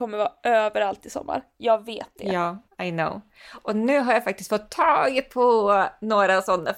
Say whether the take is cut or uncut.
cut